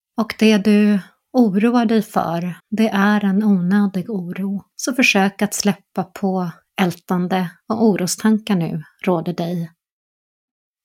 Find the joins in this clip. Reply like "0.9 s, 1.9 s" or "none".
2.6 s, 4.7 s